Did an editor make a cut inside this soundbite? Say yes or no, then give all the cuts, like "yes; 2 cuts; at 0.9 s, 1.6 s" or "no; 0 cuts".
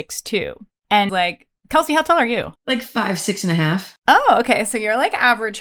yes; 3 cuts; at 1.1 s, 2.6 s, 4.0 s